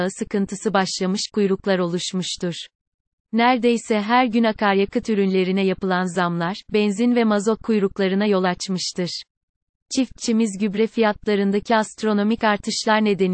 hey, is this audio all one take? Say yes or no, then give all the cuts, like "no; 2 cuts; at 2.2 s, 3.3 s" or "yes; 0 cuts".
yes; 0 cuts